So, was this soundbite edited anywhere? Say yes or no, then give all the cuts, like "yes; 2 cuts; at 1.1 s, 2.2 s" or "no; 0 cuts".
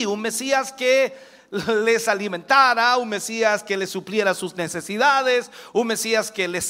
no; 0 cuts